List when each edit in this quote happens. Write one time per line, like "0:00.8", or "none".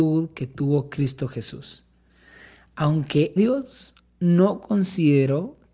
0:03.4